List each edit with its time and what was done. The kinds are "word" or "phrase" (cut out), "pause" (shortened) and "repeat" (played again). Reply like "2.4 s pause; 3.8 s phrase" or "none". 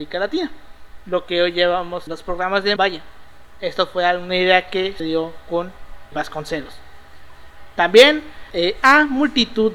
2.1 s word; 2.8 s word; 5.0 s word; 6.1 s word; 8.5 s word

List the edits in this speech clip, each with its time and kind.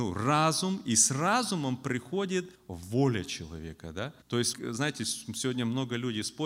2.5 s pause; 4.2 s pause; 4.5 s word

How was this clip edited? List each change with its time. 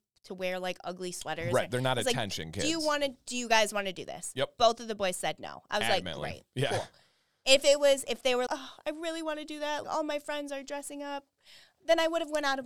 8.5 s word; 9.8 s word

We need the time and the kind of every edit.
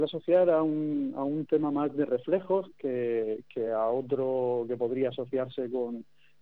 none

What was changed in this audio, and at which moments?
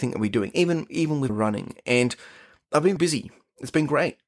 1.3 s word; 3.0 s word

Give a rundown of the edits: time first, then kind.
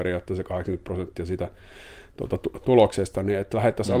2.6 s word

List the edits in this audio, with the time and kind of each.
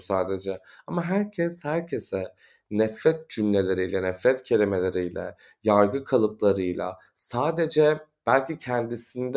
none

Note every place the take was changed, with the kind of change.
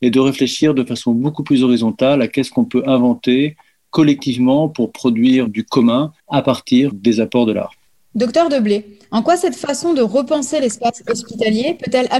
5.5 s word; 6.2 s pause; 6.9 s word; 7.9 s pause

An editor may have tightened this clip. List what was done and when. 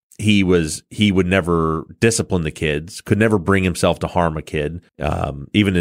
4.9 s pause

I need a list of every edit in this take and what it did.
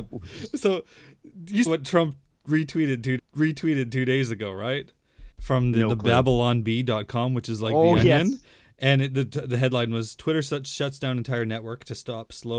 1.7 s word; 3.2 s repeat; 5.3 s pause

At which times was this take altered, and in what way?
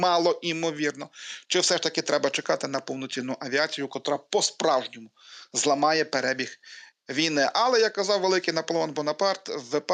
none

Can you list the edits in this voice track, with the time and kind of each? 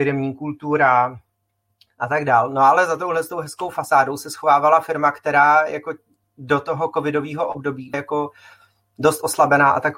7.9 s word

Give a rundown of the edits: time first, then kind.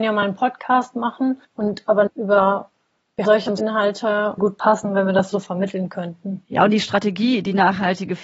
1.4 s pause; 2.1 s word; 3.2 s word; 3.6 s word; 4.4 s phrase; 5.3 s word

